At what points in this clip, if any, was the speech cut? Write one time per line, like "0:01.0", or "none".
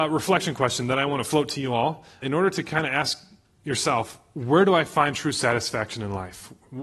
0:02.2